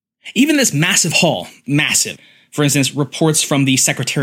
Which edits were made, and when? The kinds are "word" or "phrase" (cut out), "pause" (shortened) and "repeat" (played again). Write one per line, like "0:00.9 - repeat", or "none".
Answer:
0:01.6 - phrase